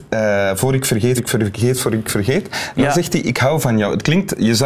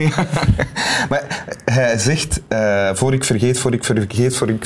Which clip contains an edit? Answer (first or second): first